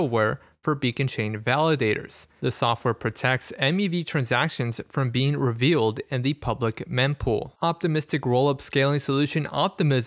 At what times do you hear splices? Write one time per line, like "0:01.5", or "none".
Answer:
0:07.5

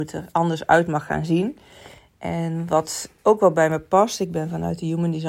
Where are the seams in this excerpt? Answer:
0:03.2

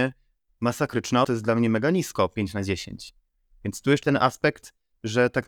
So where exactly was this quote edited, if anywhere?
0:01.2
0:04.0

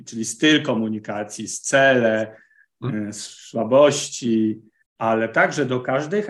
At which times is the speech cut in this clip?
0:04.8

